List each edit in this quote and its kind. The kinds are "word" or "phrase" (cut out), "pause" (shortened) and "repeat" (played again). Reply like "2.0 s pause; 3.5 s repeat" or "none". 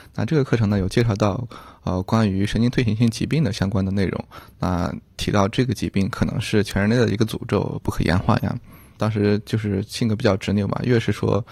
7.8 s phrase